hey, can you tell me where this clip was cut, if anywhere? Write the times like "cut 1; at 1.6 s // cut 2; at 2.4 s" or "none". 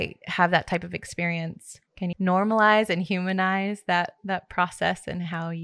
cut 1; at 2.1 s